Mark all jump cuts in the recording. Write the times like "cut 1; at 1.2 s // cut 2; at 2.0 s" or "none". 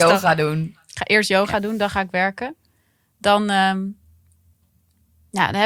none